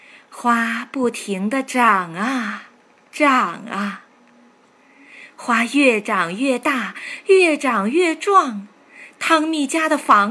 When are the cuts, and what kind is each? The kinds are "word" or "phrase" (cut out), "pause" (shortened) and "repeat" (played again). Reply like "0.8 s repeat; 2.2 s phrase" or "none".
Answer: none